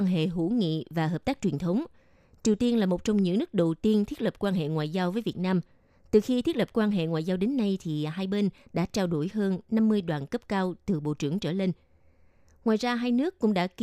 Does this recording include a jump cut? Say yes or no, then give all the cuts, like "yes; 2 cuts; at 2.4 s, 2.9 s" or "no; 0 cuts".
no; 0 cuts